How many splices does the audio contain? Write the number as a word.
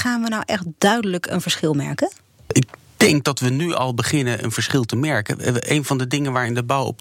zero